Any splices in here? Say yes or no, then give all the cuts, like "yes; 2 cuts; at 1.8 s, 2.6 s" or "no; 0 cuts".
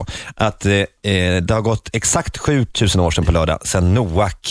no; 0 cuts